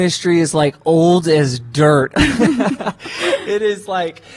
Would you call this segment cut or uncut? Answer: uncut